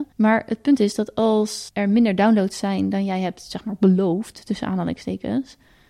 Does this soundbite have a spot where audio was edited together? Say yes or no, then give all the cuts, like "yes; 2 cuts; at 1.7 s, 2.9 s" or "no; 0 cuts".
no; 0 cuts